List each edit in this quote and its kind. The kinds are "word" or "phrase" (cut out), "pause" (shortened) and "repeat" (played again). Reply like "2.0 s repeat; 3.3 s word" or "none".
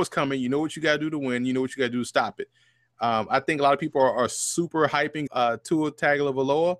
5.3 s word